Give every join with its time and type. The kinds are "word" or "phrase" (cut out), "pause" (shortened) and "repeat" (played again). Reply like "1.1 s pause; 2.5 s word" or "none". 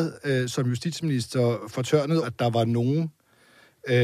2.2 s word